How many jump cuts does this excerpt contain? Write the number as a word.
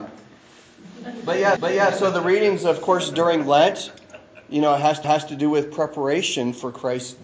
two